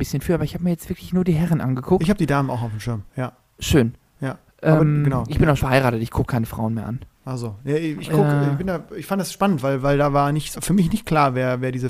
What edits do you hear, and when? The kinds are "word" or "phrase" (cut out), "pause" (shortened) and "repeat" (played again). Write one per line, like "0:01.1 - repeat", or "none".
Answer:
0:03.1 - pause
0:05.6 - word
0:07.1 - pause
0:10.5 - word